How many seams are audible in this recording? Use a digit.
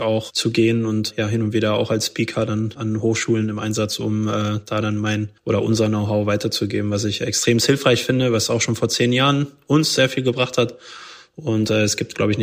1